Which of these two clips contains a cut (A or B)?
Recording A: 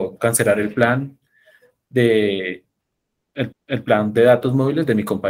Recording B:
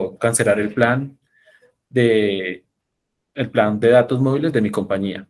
A